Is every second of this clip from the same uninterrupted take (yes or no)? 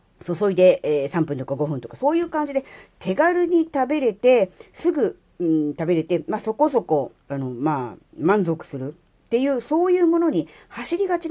no